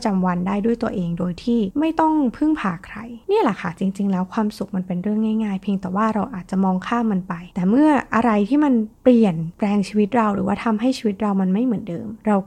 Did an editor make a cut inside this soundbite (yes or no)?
yes